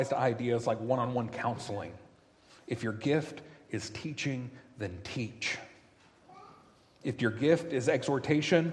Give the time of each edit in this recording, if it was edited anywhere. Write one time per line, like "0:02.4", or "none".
none